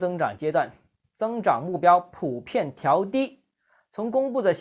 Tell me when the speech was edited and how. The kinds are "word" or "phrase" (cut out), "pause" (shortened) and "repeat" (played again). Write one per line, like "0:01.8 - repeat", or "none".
none